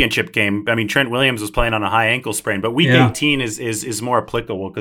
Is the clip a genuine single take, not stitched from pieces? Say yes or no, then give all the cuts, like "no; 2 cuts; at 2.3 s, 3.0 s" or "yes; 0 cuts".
yes; 0 cuts